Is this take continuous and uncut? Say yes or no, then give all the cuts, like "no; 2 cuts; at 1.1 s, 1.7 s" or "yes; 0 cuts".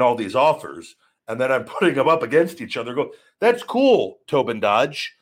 yes; 0 cuts